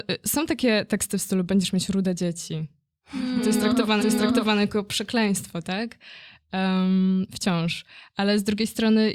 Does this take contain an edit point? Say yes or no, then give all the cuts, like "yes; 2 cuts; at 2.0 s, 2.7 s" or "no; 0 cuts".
yes; 1 cut; at 4.0 s